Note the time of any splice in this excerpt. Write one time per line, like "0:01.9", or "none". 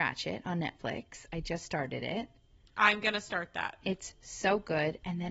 none